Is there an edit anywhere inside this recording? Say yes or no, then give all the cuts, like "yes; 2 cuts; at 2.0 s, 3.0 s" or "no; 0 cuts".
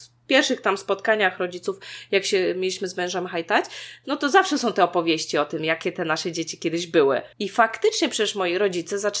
yes; 1 cut; at 7.3 s